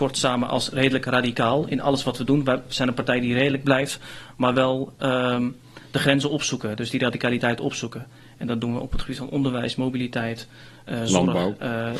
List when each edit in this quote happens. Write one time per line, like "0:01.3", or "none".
none